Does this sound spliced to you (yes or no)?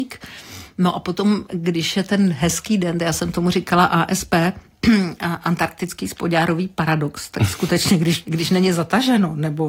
yes